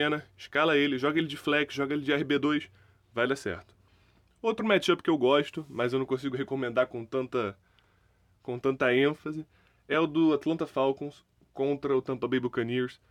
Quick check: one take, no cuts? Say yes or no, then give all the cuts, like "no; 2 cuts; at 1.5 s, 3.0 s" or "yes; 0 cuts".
yes; 0 cuts